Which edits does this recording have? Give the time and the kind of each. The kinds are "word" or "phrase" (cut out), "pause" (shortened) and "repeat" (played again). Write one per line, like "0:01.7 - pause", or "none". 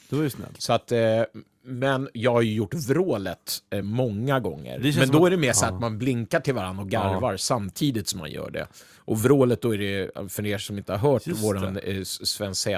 none